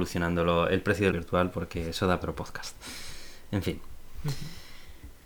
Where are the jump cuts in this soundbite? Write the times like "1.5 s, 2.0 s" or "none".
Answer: 1.1 s, 2.2 s